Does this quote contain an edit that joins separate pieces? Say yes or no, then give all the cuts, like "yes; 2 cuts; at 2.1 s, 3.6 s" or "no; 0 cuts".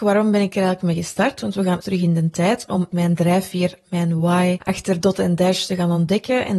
yes; 1 cut; at 1.8 s